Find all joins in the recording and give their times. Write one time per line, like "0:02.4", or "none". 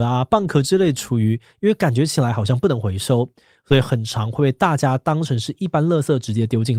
none